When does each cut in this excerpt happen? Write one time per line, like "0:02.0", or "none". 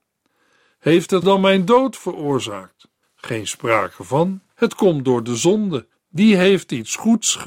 0:01.2
0:03.0
0:04.5
0:05.9